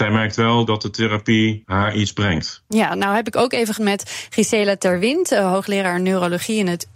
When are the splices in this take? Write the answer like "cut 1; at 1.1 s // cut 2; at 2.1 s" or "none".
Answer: cut 1; at 3.8 s